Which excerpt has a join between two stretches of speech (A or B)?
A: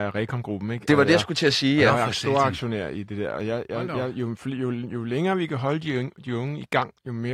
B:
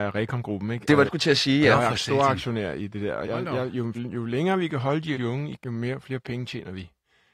B